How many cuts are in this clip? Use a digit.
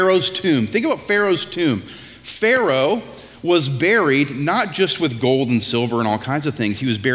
0